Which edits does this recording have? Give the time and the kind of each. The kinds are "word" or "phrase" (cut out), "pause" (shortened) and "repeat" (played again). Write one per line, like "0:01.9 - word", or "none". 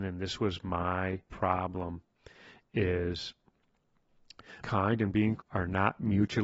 0:01.3 - word
0:04.6 - word
0:05.4 - word